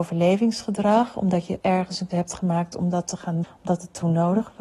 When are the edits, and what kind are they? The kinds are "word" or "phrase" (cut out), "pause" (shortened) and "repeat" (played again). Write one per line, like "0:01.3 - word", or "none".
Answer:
0:01.6 - word
0:02.1 - word
0:03.4 - word